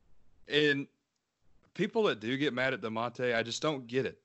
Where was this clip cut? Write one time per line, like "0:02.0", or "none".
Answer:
none